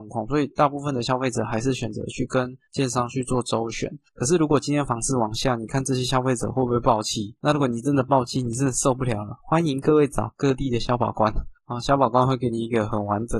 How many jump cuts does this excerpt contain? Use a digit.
4